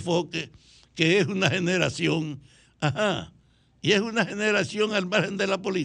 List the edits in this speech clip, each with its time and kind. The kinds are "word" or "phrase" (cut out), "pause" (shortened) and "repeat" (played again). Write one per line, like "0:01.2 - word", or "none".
none